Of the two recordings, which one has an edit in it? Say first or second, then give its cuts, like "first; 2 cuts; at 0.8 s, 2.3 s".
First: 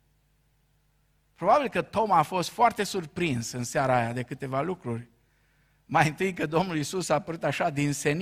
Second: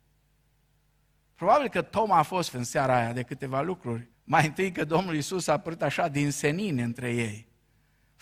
second; 2 cuts; at 2.5 s, 4.1 s